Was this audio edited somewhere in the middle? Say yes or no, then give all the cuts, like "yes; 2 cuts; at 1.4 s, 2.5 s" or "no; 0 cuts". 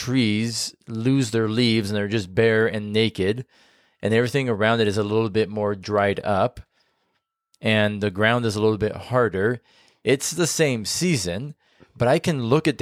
no; 0 cuts